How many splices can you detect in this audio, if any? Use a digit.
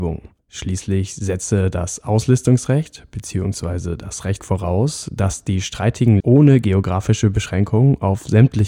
2